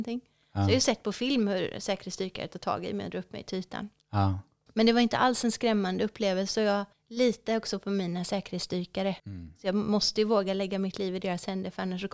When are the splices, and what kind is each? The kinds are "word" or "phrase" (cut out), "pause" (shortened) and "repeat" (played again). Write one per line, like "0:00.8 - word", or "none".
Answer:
0:04.7 - pause
0:06.9 - pause
0:09.2 - pause